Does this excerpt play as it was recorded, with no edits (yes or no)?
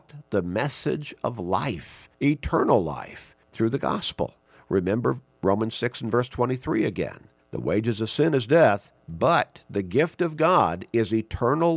no